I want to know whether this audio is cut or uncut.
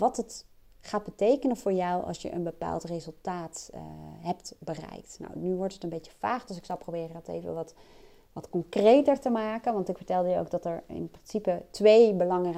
uncut